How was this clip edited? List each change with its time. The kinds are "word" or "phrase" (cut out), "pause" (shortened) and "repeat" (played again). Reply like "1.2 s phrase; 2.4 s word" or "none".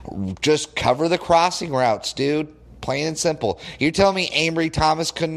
none